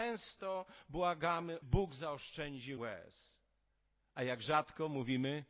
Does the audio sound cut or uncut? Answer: cut